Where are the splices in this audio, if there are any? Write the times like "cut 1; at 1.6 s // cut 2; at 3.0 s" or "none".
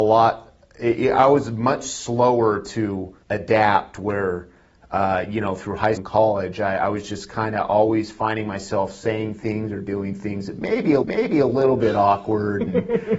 cut 1; at 3.2 s // cut 2; at 6.0 s // cut 3; at 11.0 s